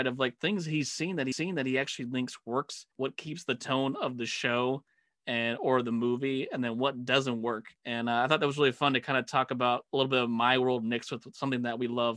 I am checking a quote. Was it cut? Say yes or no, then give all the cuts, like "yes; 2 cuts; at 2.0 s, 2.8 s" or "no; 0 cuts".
yes; 3 cuts; at 1.3 s, 2.9 s, 7.7 s